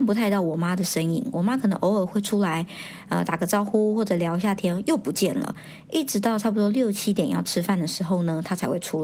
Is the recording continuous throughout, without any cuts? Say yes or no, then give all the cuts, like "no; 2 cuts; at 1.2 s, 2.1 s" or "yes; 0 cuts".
yes; 0 cuts